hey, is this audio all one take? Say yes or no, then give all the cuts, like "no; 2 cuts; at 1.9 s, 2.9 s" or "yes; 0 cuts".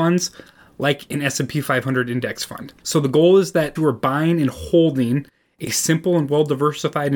no; 2 cuts; at 2.8 s, 3.8 s